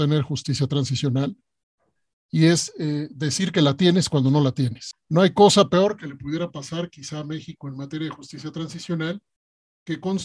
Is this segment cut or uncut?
uncut